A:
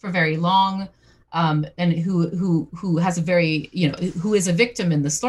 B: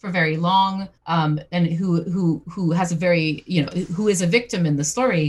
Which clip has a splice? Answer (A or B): B